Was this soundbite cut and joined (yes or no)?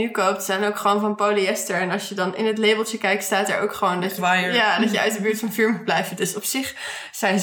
yes